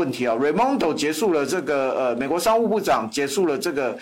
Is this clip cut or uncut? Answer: uncut